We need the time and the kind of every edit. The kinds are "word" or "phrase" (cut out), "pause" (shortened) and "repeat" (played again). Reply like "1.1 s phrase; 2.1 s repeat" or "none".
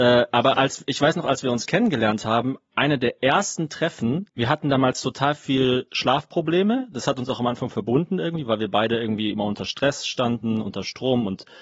4.3 s pause